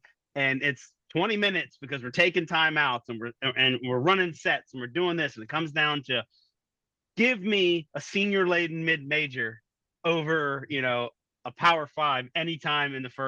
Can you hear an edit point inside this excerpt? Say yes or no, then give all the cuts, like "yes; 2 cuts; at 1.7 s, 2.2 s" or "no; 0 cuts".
no; 0 cuts